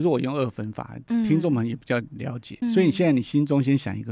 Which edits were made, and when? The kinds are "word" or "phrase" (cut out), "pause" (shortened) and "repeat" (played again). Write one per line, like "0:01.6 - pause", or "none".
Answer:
0:02.6 - word